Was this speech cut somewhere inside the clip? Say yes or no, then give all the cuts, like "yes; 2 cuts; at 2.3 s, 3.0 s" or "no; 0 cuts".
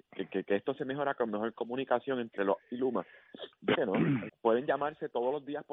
yes; 3 cuts; at 2.6 s, 3.7 s, 4.3 s